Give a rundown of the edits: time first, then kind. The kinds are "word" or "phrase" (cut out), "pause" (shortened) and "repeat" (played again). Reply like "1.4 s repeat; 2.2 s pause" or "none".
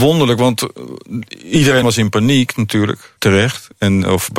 1.8 s phrase; 3.2 s pause